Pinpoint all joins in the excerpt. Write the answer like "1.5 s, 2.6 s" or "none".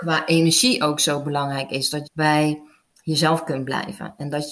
2.0 s

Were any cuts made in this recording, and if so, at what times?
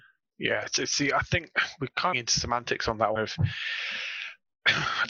2.1 s, 3.2 s

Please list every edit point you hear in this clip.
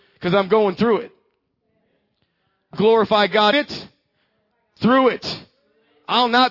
2.7 s, 3.5 s

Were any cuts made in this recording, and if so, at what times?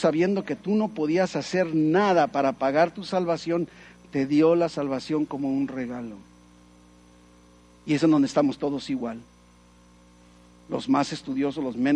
none

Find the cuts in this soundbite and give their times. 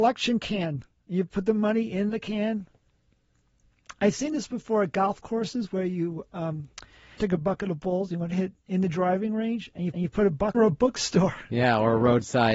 7.2 s, 9.9 s, 10.5 s

